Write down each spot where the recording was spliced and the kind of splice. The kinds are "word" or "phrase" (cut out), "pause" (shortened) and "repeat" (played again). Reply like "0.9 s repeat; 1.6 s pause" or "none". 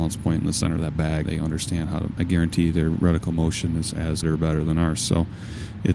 1.2 s word; 2.2 s phrase; 4.2 s word